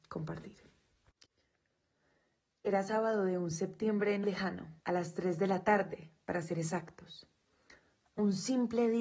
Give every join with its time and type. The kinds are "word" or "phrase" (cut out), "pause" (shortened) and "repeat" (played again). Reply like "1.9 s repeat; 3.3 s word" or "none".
4.2 s word; 4.8 s pause; 6.2 s pause

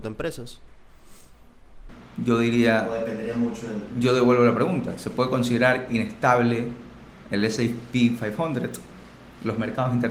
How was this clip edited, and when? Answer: none

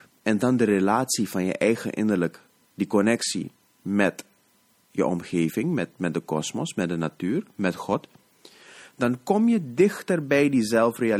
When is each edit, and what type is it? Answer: none

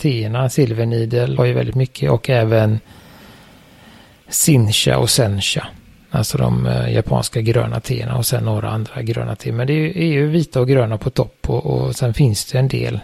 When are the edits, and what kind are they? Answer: 1.4 s phrase

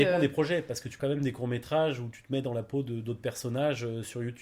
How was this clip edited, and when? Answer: 1.0 s phrase

